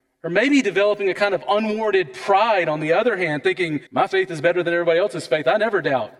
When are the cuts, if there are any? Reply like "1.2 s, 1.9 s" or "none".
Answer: 3.9 s

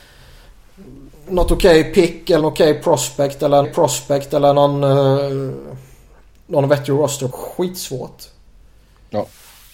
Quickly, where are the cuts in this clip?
2.4 s, 3.6 s, 7.3 s

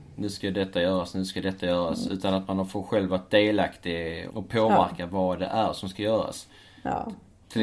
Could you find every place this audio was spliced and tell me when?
4.3 s

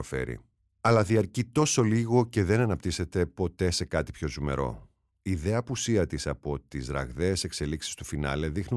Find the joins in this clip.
none

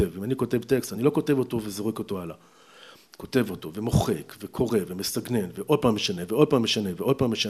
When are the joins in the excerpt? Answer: none

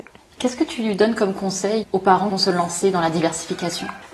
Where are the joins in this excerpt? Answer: 1.8 s, 2.3 s

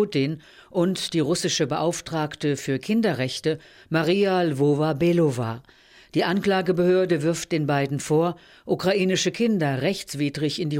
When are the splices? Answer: none

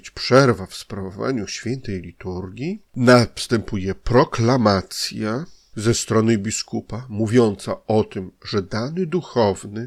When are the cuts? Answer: 2.9 s

